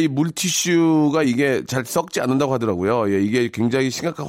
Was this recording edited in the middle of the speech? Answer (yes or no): no